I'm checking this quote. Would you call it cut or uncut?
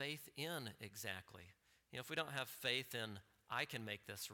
uncut